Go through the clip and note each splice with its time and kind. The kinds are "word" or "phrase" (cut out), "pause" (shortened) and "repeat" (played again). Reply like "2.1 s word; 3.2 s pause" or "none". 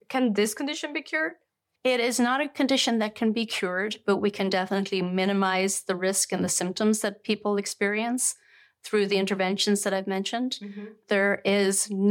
none